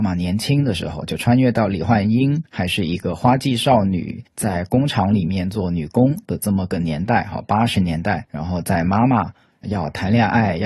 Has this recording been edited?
yes; 1 cut; at 9.6 s

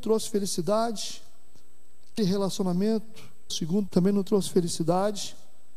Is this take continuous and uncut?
no; 3 cuts; at 2.2 s, 3.5 s, 3.9 s

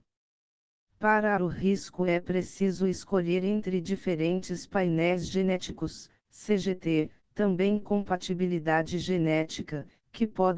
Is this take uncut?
no; 2 cuts; at 1.4 s, 7.8 s

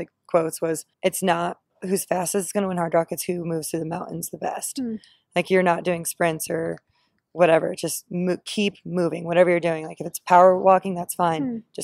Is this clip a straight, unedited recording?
no; 1 cut; at 0.9 s

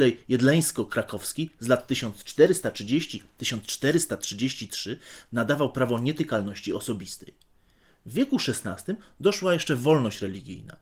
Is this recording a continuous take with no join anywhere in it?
yes; 0 cuts

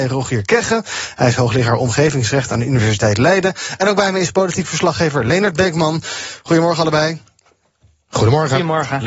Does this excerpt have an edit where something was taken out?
no; 0 cuts

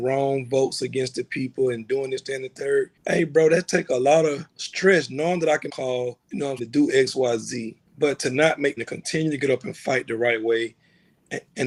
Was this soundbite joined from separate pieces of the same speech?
yes; 7 cuts; at 3.0 s, 4.5 s, 5.7 s, 6.2 s, 6.6 s, 7.9 s, 8.8 s

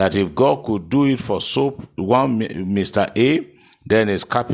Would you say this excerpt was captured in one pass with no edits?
yes; 0 cuts

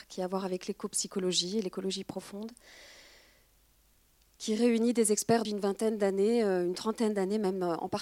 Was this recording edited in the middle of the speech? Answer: yes; 1 cut; at 5.4 s

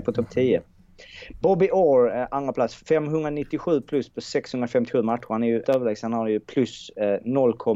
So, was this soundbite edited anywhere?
yes; 2 cuts; at 2.8 s, 5.6 s

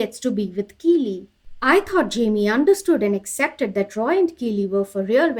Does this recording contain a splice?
no; 0 cuts

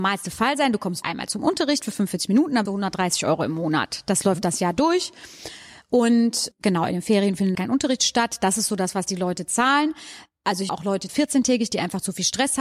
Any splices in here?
yes; 6 cuts; at 1.0 s, 2.7 s, 6.5 s, 7.5 s, 10.7 s, 11.1 s

